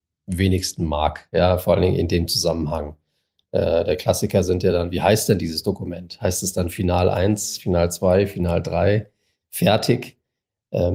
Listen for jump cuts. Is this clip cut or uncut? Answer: uncut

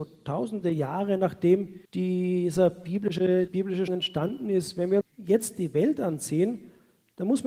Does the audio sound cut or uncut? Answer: cut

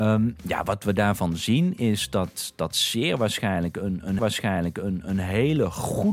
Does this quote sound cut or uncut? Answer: cut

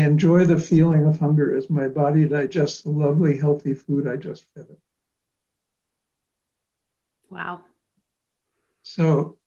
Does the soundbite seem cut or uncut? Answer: uncut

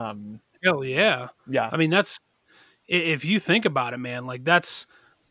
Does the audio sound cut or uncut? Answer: uncut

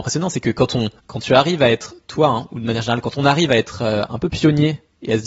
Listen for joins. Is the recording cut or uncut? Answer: cut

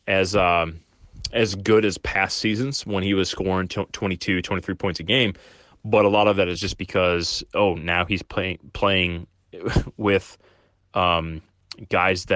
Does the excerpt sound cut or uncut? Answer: uncut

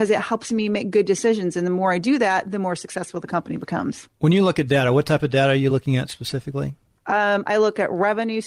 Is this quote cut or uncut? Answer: uncut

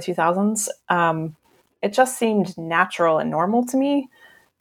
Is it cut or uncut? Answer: uncut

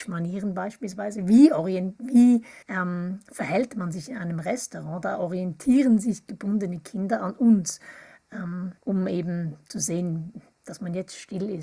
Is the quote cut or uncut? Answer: cut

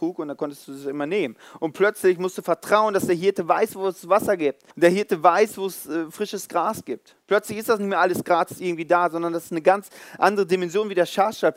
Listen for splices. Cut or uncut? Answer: cut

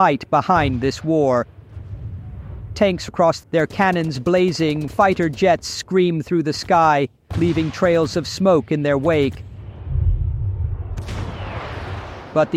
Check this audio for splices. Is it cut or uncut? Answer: cut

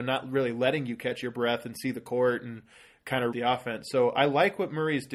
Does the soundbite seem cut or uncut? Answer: cut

